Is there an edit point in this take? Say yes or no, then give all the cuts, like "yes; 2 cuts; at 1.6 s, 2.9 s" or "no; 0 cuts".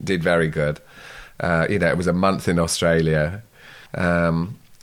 yes; 1 cut; at 3.9 s